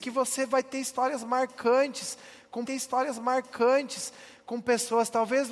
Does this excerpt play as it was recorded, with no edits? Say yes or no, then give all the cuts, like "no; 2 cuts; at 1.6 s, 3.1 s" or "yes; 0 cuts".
no; 1 cut; at 2.7 s